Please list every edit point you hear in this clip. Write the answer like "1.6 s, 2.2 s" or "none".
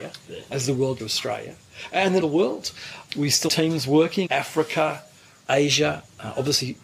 1.0 s, 2.2 s, 3.1 s, 3.5 s, 4.3 s, 5.5 s